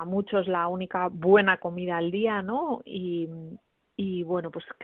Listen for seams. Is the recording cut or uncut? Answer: uncut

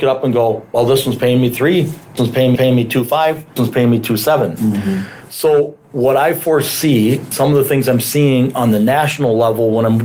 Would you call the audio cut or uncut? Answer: cut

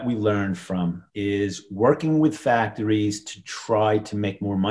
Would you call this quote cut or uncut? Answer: cut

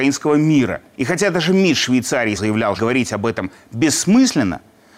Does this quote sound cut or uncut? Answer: cut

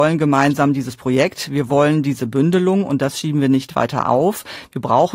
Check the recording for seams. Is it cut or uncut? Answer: uncut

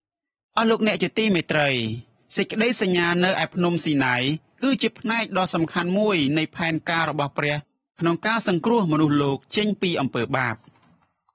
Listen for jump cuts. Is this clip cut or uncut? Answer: uncut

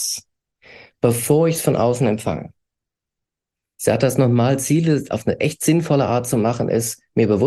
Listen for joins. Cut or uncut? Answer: uncut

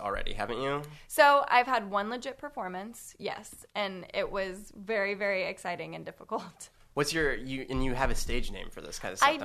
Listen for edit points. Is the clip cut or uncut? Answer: uncut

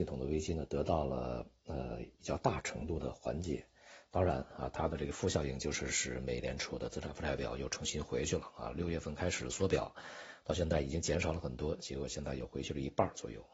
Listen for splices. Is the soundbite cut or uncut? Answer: cut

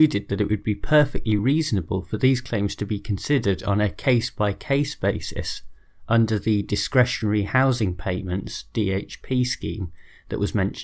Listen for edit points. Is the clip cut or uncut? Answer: uncut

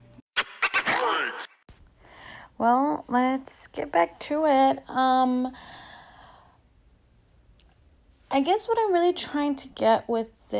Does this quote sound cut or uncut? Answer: uncut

